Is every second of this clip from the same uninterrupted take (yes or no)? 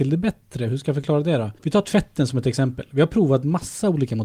no